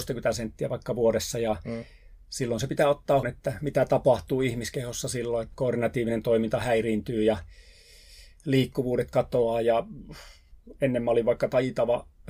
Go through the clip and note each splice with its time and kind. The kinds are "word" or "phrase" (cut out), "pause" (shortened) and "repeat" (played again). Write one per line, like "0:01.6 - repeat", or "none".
0:03.2 - word
0:05.5 - word